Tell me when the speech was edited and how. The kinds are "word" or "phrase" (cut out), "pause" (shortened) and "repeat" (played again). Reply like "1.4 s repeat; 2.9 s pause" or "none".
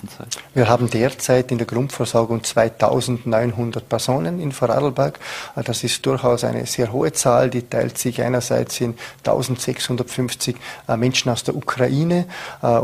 none